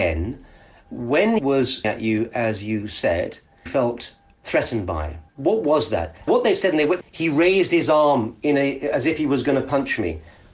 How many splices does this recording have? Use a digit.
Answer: 6